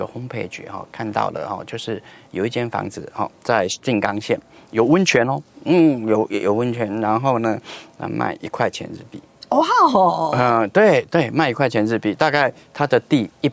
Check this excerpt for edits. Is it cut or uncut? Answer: uncut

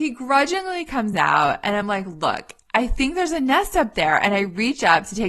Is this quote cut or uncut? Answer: uncut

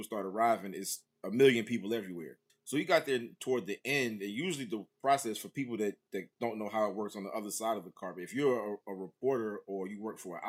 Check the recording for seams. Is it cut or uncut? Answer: cut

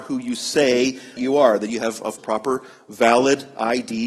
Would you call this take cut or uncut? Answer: cut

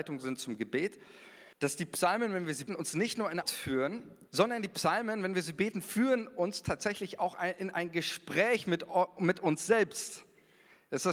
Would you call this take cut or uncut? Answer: cut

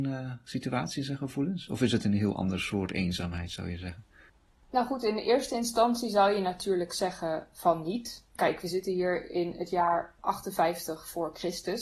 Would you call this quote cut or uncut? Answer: uncut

